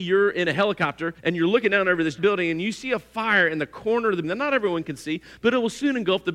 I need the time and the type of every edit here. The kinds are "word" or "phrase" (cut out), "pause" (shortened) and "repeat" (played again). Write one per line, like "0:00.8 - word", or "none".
0:01.2 - pause
0:02.2 - word
0:04.2 - word